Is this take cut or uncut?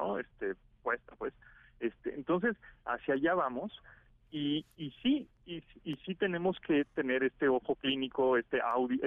uncut